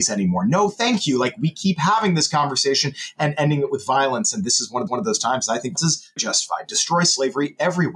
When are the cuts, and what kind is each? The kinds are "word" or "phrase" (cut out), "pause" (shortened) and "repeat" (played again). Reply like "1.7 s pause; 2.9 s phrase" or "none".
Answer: 4.9 s repeat; 5.8 s word; 6.2 s word